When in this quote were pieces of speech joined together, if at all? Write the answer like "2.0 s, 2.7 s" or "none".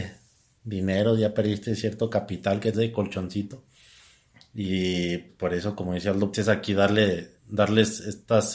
2.7 s, 5.3 s, 6.3 s, 7.4 s